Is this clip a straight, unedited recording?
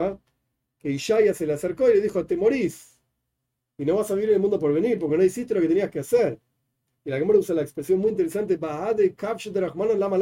yes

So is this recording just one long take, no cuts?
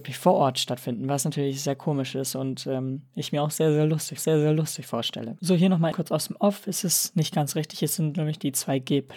no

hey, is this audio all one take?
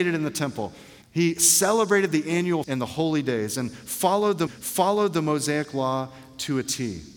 no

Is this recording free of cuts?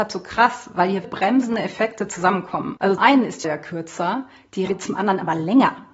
no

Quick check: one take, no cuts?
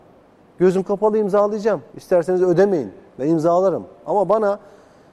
no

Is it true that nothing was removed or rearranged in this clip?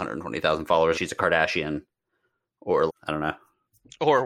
no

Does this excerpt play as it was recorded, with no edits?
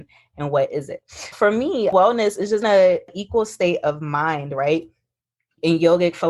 no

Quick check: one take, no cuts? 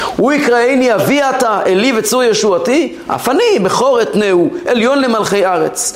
yes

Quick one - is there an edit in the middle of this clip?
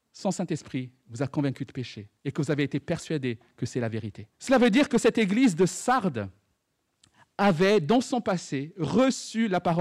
yes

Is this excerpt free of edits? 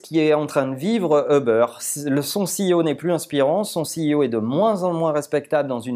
yes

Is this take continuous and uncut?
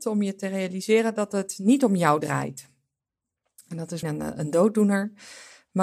no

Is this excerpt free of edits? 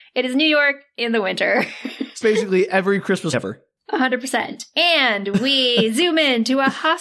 no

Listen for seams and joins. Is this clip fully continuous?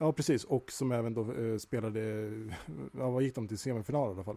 yes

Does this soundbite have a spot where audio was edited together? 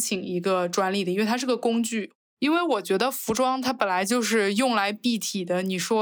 no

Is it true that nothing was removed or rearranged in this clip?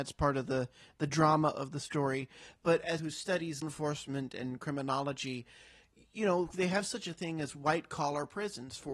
no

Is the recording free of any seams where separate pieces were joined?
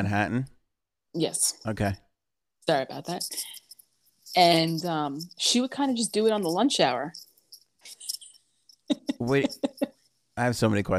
yes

